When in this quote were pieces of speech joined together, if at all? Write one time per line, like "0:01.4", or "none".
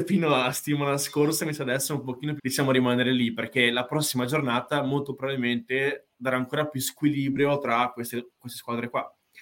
0:02.4